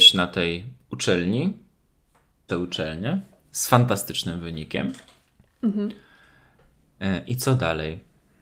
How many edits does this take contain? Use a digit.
1